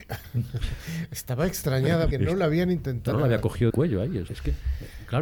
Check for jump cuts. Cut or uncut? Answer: cut